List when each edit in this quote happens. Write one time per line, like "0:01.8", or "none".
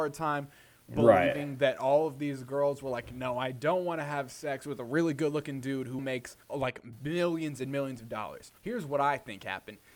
0:06.0
0:06.4
0:08.6